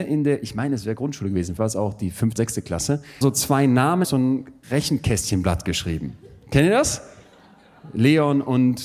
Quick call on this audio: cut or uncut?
cut